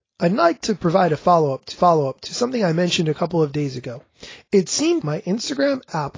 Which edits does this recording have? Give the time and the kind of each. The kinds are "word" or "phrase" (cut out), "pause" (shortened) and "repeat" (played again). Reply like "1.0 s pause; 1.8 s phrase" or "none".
1.7 s repeat; 5.0 s word